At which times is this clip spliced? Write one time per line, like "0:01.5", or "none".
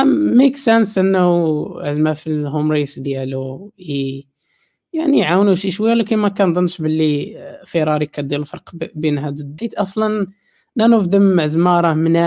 0:09.6